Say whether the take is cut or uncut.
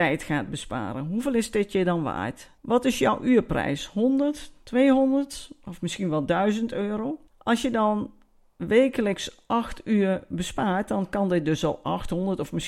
cut